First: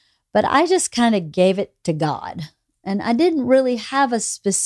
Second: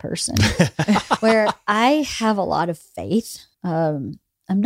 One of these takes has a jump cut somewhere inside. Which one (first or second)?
second